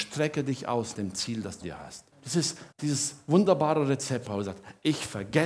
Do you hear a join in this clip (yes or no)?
yes